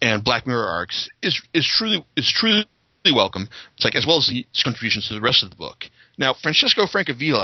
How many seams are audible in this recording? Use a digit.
1